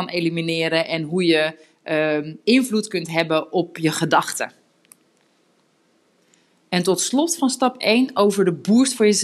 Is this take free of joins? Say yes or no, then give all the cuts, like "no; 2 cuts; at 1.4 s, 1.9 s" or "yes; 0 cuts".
yes; 0 cuts